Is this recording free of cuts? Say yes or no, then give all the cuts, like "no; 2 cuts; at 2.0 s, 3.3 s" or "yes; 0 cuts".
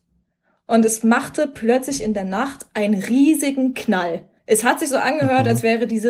no; 1 cut; at 4.4 s